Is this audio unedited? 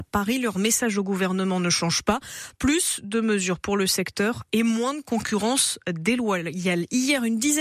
yes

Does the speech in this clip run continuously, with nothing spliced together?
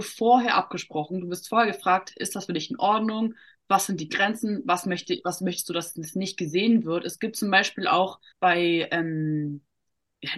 no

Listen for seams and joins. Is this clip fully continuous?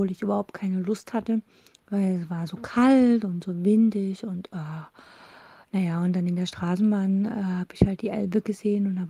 yes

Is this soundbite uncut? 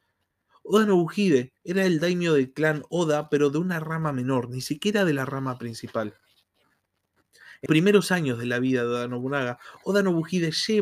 no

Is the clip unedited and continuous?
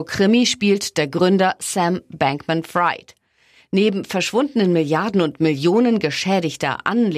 yes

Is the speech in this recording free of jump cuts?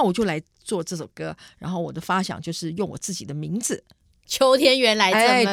yes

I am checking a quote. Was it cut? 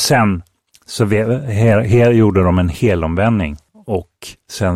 no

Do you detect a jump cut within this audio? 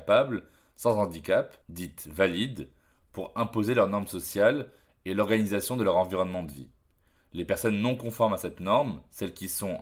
yes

